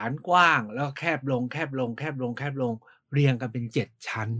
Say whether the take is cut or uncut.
uncut